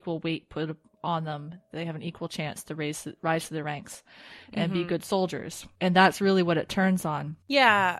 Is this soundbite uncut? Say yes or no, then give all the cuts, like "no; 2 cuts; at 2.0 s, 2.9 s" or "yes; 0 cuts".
yes; 0 cuts